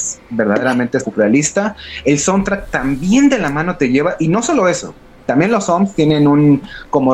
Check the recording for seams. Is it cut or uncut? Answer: uncut